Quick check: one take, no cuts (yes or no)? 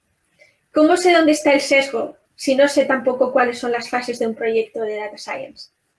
no